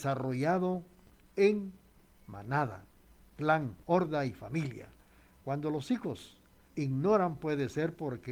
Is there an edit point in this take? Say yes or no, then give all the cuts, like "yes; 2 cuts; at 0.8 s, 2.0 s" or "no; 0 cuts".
yes; 2 cuts; at 3.8 s, 6.7 s